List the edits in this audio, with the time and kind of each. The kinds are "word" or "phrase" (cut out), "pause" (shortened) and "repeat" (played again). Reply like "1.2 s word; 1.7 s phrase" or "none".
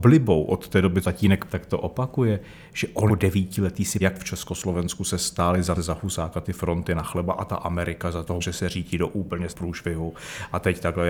1.0 s word; 1.5 s word; 3.1 s word; 4.0 s word; 5.7 s word; 8.4 s word; 9.5 s word